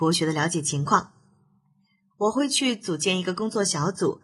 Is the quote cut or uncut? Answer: uncut